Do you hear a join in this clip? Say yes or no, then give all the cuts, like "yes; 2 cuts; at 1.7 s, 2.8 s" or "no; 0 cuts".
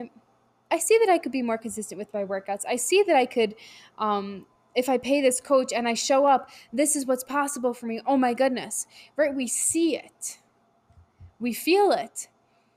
no; 0 cuts